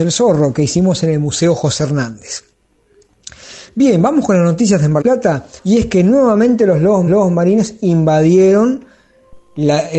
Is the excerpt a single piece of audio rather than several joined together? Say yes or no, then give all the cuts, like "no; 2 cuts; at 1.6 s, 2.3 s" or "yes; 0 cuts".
no; 3 cuts; at 5.0 s, 5.6 s, 7.1 s